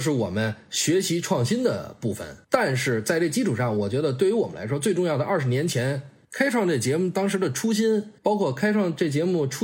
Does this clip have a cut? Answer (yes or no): yes